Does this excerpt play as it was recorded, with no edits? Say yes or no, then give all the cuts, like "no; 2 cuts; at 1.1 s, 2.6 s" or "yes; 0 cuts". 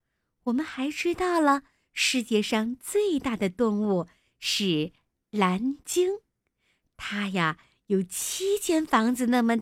yes; 0 cuts